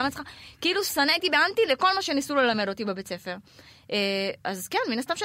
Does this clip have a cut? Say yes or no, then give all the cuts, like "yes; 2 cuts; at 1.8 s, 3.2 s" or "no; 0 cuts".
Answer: no; 0 cuts